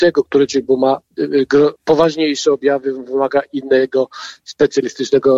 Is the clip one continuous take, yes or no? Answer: no